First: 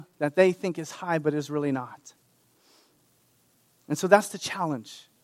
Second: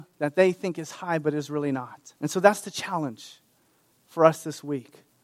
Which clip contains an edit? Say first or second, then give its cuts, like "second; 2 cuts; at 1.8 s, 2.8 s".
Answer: second; 1 cut; at 2.2 s